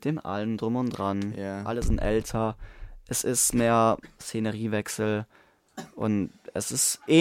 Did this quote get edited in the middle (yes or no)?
no